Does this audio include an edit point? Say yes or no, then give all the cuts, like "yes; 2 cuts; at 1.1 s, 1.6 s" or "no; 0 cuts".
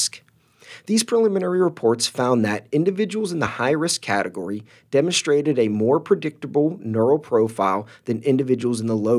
no; 0 cuts